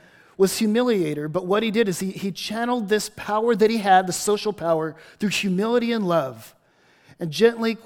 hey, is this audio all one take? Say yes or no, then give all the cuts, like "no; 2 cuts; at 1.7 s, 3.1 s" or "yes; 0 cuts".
yes; 0 cuts